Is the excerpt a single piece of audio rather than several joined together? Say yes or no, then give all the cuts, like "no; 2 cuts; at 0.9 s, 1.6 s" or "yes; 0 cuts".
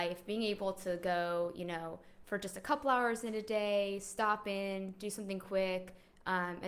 yes; 0 cuts